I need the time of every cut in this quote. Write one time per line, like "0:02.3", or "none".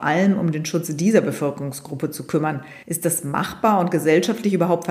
0:02.8